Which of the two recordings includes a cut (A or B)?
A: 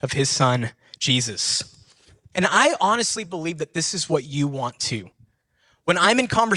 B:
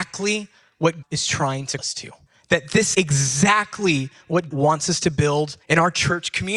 B